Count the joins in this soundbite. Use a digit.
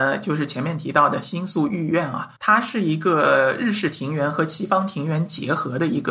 1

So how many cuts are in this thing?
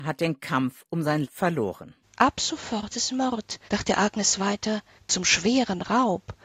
4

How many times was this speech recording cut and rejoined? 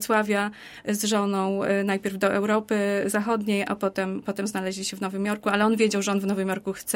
0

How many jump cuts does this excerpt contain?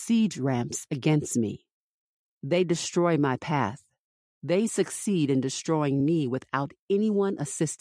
0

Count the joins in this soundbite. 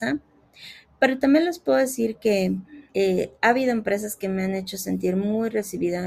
1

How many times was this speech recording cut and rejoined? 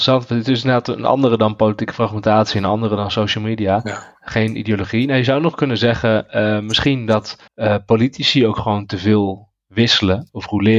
1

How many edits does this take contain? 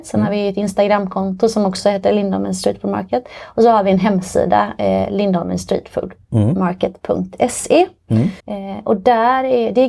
1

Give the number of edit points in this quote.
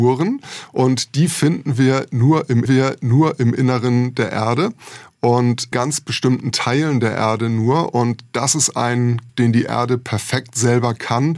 3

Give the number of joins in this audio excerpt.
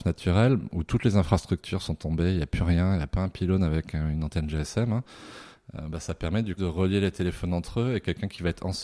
1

